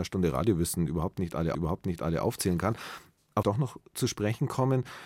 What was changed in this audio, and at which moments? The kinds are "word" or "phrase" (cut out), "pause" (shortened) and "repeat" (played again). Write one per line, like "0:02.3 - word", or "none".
0:01.5 - repeat
0:03.4 - phrase